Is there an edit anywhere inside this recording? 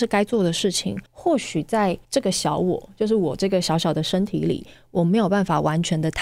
yes; 2 cuts; at 1.1 s, 2.0 s

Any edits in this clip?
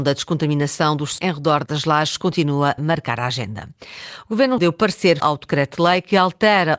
yes; 5 cuts; at 1.2 s, 1.7 s, 2.8 s, 4.6 s, 5.2 s

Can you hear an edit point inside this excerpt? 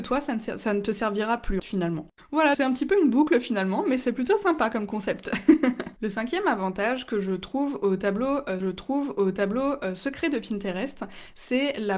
yes; 4 cuts; at 1.6 s, 2.5 s, 6.0 s, 8.6 s

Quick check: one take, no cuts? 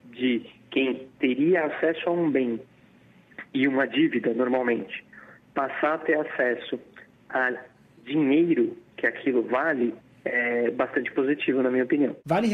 yes; 0 cuts

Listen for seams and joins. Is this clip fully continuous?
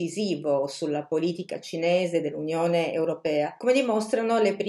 no; 1 cut; at 3.6 s

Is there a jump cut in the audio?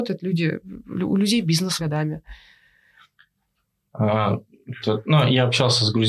yes; 2 cuts; at 1.8 s, 4.8 s

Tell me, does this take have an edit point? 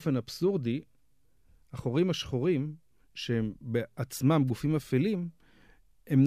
no; 0 cuts

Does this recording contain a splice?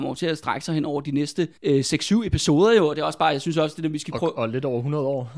yes; 1 cut; at 1.6 s

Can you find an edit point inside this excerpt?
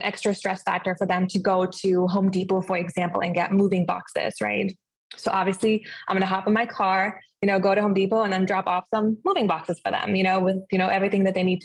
no; 0 cuts

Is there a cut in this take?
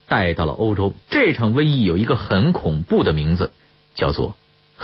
yes; 1 cut; at 1.0 s

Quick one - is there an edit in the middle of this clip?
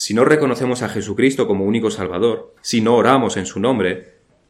yes; 1 cut; at 2.6 s

